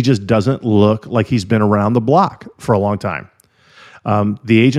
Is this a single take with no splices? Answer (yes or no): yes